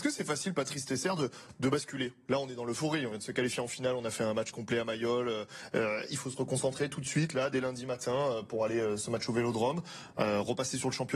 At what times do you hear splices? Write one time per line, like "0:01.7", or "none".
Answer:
none